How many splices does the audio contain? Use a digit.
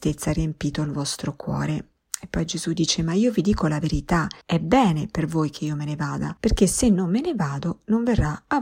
3